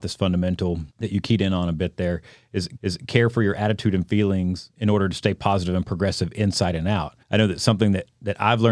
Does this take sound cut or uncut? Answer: cut